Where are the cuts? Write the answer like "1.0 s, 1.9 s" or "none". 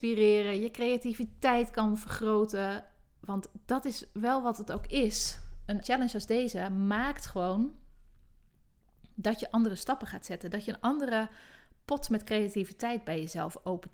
5.8 s